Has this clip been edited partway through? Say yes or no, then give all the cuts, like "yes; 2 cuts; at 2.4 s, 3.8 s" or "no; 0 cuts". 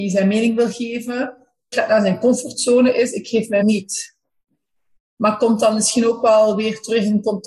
yes; 2 cuts; at 1.7 s, 3.6 s